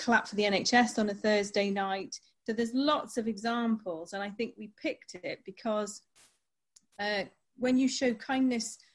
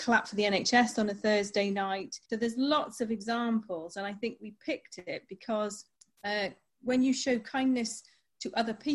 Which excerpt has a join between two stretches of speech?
second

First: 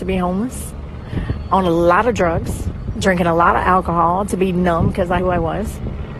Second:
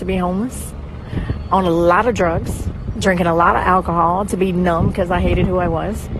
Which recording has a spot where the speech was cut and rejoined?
first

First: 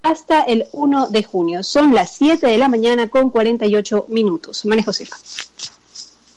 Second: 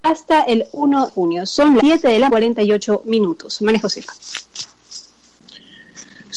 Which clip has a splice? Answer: second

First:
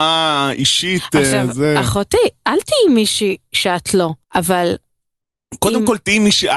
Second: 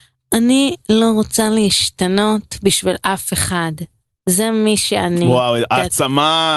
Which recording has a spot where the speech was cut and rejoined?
first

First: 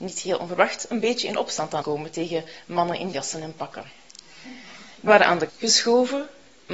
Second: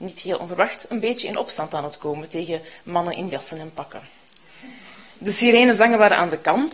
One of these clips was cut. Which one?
first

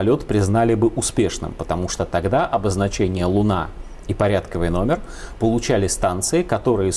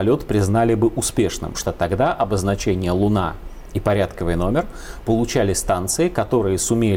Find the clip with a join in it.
second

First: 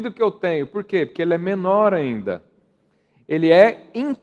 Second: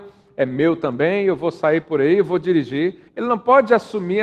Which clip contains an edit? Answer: second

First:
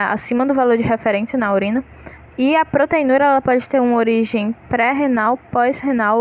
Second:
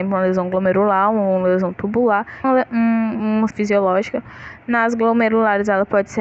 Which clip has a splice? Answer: second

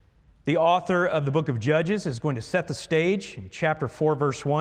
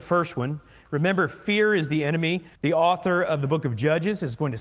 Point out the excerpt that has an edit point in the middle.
second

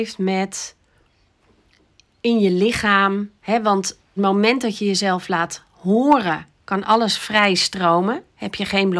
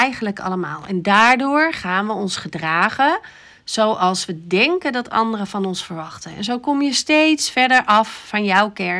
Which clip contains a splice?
first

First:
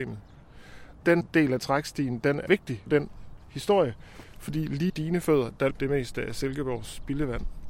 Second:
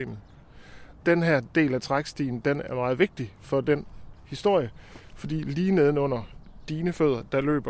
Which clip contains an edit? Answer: first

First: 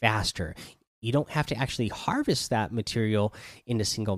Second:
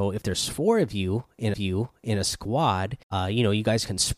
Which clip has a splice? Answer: second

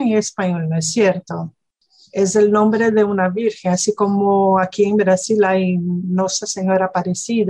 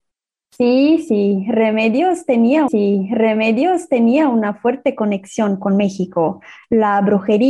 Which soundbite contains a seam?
second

